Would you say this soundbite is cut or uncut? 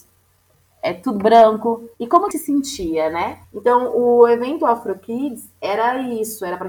cut